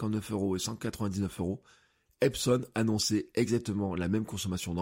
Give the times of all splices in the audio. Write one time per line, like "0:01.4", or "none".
none